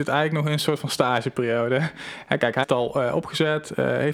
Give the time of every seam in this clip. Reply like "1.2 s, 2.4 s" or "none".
2.6 s